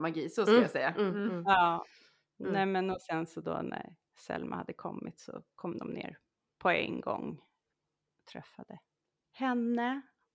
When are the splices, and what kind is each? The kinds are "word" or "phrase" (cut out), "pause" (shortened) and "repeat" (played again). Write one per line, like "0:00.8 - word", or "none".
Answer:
none